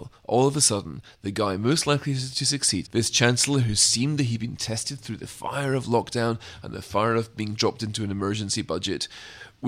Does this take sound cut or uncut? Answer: cut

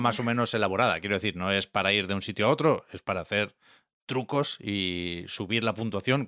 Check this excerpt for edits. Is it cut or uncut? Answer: uncut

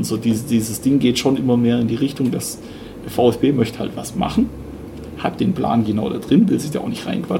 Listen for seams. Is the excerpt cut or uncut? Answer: uncut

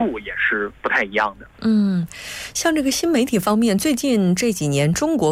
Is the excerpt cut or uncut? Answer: cut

